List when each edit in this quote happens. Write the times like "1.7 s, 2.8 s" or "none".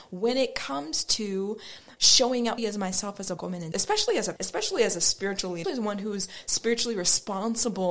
2.0 s, 2.6 s, 3.4 s, 3.7 s, 4.4 s, 5.6 s